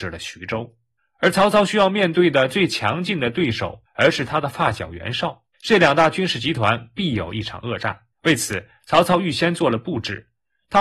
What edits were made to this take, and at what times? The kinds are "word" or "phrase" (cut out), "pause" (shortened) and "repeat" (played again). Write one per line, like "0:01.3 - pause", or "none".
0:01.0 - pause
0:03.9 - phrase
0:05.5 - pause
0:08.1 - pause

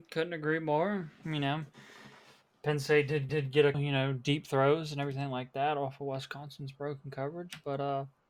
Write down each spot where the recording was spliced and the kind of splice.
0:03.3 - repeat
0:03.7 - word

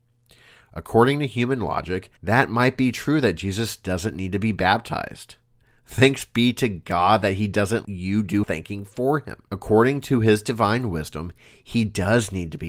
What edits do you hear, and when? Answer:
0:02.2 - pause
0:07.8 - word
0:08.4 - word
0:09.5 - pause

